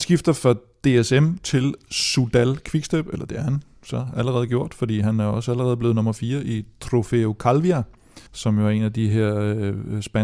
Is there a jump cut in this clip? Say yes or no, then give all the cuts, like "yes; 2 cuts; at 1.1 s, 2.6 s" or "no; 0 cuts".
yes; 1 cut; at 8.3 s